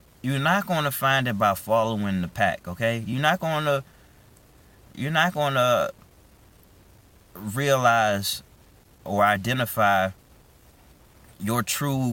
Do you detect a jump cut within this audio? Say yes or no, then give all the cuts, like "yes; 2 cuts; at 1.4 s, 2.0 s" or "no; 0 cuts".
no; 0 cuts